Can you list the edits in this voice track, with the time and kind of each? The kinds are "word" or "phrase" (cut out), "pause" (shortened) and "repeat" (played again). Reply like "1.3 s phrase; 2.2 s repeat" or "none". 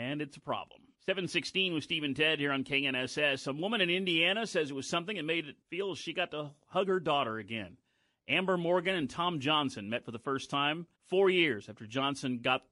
0.9 s pause; 5.6 s pause; 10.9 s pause